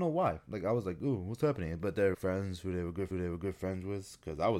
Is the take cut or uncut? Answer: cut